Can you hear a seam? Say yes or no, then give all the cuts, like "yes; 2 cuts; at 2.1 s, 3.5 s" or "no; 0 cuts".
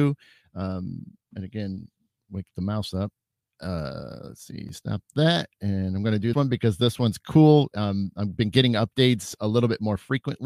yes; 1 cut; at 6.3 s